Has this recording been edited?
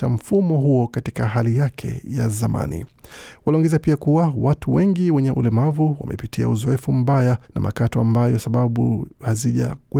yes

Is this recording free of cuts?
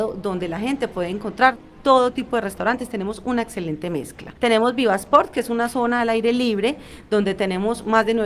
yes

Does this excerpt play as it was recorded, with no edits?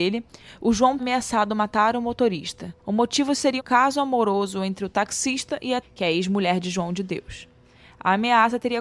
no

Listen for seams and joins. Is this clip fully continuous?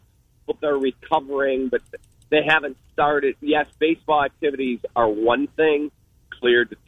yes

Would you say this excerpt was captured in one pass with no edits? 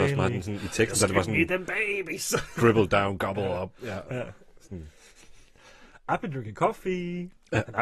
yes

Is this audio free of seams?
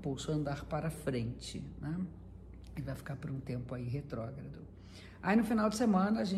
yes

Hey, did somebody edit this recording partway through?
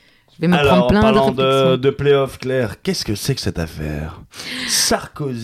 no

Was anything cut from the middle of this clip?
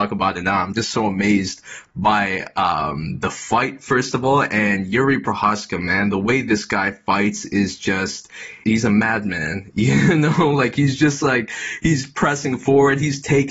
yes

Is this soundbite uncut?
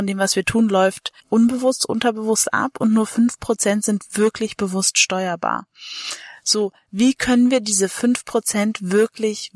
no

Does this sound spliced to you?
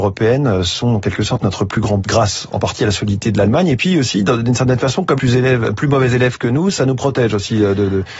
yes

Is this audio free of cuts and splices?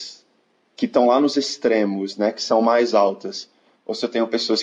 yes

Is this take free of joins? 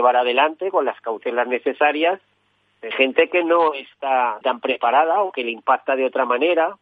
no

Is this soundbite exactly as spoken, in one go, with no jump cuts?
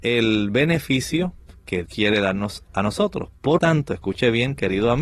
no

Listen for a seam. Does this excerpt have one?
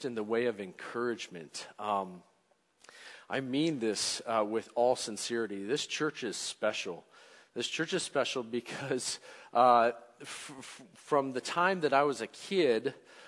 no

